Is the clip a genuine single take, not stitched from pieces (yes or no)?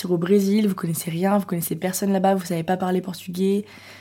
yes